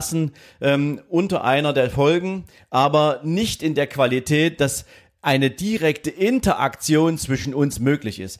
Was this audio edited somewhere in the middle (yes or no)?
no